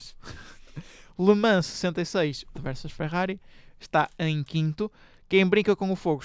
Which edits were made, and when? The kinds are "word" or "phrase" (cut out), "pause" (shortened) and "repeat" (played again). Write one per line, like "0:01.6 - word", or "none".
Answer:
0:02.5 - phrase